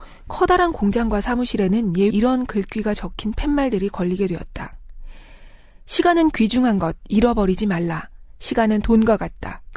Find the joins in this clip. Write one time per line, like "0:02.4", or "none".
0:02.1